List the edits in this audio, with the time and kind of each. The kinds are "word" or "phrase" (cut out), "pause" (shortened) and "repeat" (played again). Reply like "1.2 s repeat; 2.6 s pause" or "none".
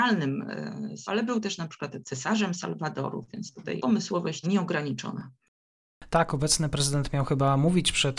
1.1 s word; 3.8 s word; 4.4 s word

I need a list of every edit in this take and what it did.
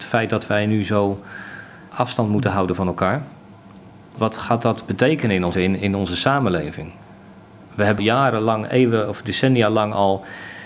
1.9 s word; 5.5 s word; 8.0 s word

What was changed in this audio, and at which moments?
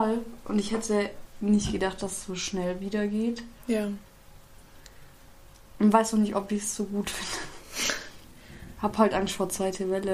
none

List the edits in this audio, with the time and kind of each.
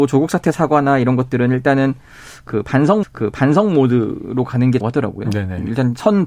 3.0 s repeat; 4.8 s word

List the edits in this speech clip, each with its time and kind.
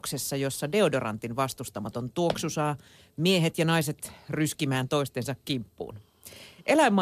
none

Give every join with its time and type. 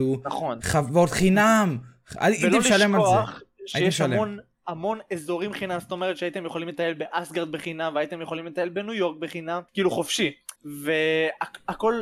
9.7 s pause; 10.6 s pause

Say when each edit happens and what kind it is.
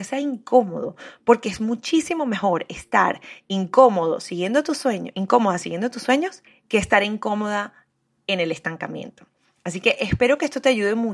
6.5 s pause

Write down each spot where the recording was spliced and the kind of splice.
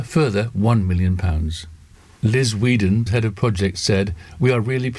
3.1 s word

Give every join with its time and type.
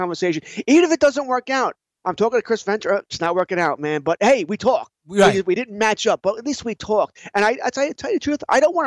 none

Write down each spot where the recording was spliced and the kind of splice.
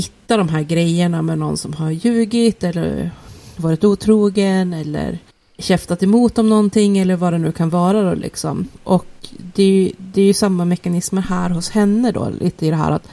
5.3 s pause; 8.7 s pause

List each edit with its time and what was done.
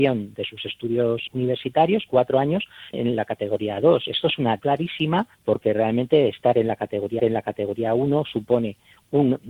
1.3 s word; 2.9 s phrase; 4.6 s word; 5.3 s pause; 7.2 s repeat

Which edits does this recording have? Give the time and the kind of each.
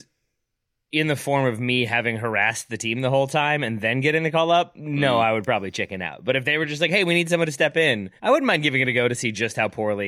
8.2 s pause

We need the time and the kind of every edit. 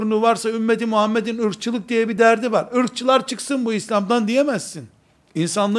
none

